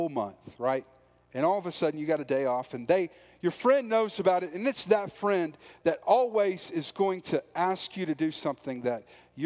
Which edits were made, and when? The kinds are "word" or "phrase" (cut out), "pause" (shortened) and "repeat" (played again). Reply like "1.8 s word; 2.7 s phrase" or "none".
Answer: 5.8 s word